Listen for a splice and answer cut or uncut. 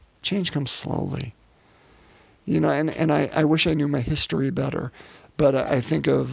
uncut